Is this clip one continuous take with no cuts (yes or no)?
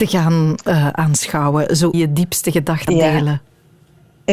no